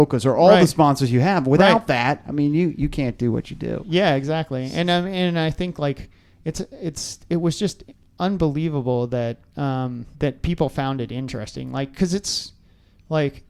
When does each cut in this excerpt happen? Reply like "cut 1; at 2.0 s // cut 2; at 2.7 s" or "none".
cut 1; at 7.9 s // cut 2; at 10.1 s

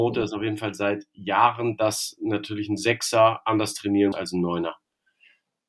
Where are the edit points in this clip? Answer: cut 1; at 4.1 s

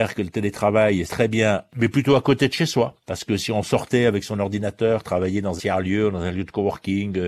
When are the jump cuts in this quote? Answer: cut 1; at 1.1 s // cut 2; at 5.6 s

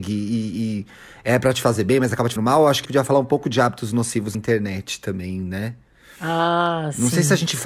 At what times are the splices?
cut 1; at 2.4 s // cut 2; at 2.8 s // cut 3; at 4.3 s

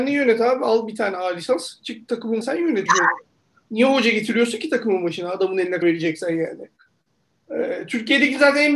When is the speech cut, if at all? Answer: cut 1; at 2.4 s // cut 2; at 2.9 s // cut 3; at 5.8 s

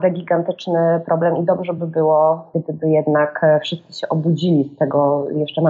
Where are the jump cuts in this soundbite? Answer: none

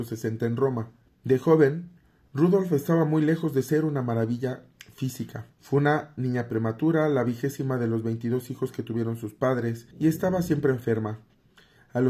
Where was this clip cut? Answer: cut 1; at 1.1 s // cut 2; at 5.5 s // cut 3; at 9.9 s

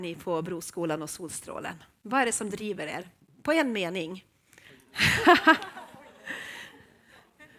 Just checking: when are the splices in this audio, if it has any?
none

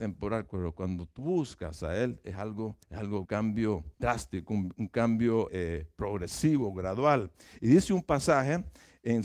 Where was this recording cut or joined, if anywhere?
cut 1; at 1.2 s // cut 2; at 2.8 s // cut 3; at 3.2 s // cut 4; at 3.9 s // cut 5; at 5.5 s

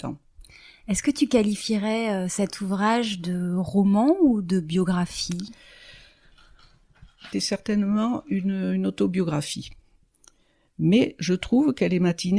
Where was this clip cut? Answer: cut 1; at 7.3 s

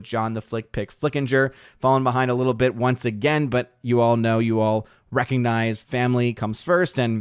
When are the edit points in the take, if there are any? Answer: cut 1; at 5.8 s

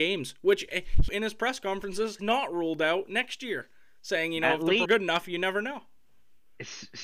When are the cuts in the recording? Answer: cut 1; at 1.1 s // cut 2; at 2.2 s // cut 3; at 4.9 s

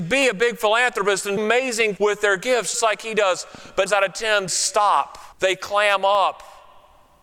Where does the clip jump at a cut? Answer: cut 1; at 1.4 s // cut 2; at 2.0 s // cut 3; at 2.7 s // cut 4; at 3.9 s // cut 5; at 4.5 s // cut 6; at 5.3 s

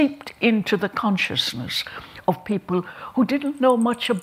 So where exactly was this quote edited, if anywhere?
none

